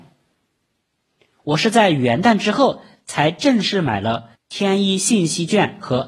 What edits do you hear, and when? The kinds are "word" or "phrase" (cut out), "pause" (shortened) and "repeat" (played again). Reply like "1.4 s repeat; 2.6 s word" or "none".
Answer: 4.3 s pause